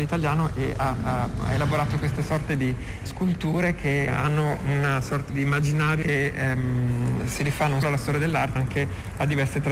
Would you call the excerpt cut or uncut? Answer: cut